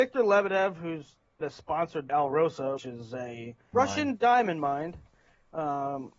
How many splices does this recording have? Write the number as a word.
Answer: four